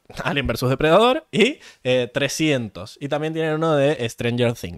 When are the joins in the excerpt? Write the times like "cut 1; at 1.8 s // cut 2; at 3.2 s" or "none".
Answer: none